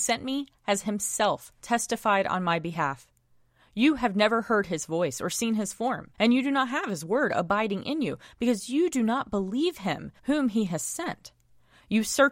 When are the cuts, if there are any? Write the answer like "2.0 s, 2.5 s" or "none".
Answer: 1.6 s, 6.1 s, 10.2 s